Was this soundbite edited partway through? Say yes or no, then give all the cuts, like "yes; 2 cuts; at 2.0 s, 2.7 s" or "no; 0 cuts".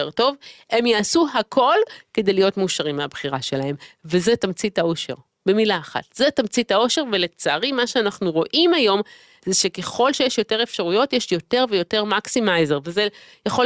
no; 0 cuts